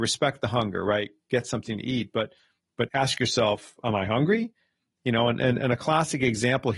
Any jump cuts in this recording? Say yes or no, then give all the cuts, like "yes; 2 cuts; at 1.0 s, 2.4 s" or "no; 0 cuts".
yes; 1 cut; at 2.9 s